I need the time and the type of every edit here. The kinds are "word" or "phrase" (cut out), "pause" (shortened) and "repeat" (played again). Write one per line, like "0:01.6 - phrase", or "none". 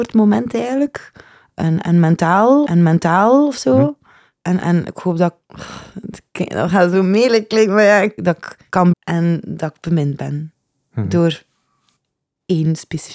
0:02.7 - repeat
0:08.2 - phrase
0:08.9 - phrase

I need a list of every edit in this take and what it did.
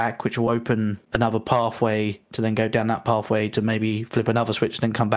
0:01.0 - pause

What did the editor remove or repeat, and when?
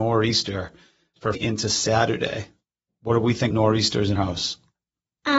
0:01.3 - word
0:03.5 - word
0:04.2 - word

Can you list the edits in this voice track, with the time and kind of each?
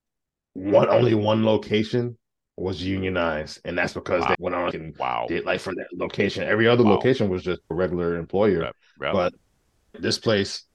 0:04.3 - word
0:04.7 - word
0:07.6 - pause

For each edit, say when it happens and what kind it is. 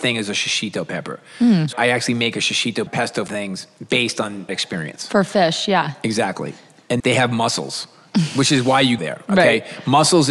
0:01.7 - word
0:02.9 - word
0:03.3 - word
0:04.5 - word
0:07.0 - word
0:09.0 - word

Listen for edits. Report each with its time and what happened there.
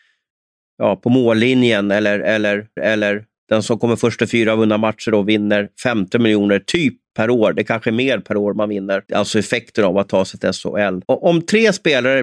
0:02.8 - repeat
0:09.1 - pause
0:11.0 - pause

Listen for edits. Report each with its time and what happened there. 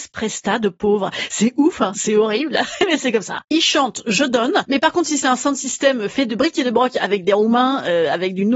0:01.9 - phrase

